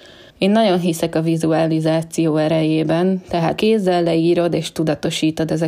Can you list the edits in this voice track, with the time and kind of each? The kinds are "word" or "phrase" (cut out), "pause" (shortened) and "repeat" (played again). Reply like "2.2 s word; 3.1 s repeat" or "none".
3.6 s word